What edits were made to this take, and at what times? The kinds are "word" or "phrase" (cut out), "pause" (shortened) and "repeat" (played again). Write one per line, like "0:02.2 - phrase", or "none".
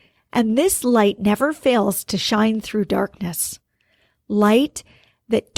none